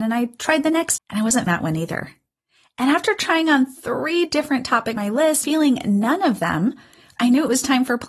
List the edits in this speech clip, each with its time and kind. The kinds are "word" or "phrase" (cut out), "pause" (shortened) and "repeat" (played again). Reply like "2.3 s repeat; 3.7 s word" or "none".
1.0 s word; 1.5 s word; 5.0 s word; 5.4 s word